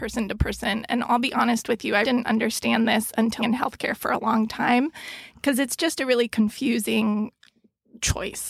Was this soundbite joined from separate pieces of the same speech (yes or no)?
yes